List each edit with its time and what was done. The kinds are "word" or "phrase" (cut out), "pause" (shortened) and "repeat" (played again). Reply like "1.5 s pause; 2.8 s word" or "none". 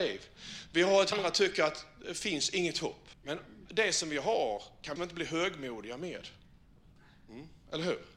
1.1 s phrase; 3.1 s pause; 5.0 s word